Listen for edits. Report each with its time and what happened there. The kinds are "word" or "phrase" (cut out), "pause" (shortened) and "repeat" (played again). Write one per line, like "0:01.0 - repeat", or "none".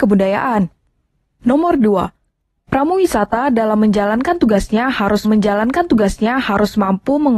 0:05.2 - repeat